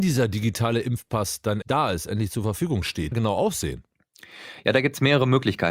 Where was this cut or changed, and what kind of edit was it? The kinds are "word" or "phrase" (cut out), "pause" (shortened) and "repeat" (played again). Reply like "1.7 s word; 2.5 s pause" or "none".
1.6 s phrase; 3.1 s phrase